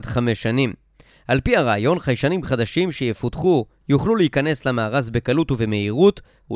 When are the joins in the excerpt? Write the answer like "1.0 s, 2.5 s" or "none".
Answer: 3.8 s